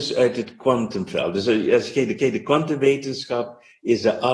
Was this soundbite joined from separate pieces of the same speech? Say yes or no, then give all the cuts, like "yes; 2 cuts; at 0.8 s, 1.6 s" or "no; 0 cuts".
yes; 1 cut; at 2.2 s